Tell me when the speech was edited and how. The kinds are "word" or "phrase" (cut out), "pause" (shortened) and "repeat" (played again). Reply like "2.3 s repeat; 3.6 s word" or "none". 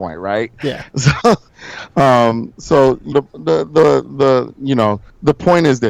3.1 s word